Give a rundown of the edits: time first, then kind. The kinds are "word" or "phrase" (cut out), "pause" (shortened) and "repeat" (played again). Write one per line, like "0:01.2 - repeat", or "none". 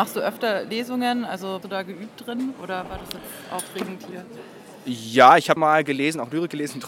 0:01.6 - word
0:05.6 - word